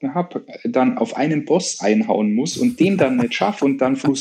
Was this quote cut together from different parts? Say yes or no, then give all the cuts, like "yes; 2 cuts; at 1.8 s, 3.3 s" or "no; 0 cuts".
no; 0 cuts